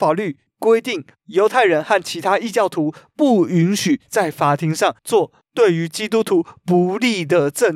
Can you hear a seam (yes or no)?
yes